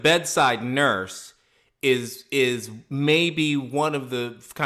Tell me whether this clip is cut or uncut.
uncut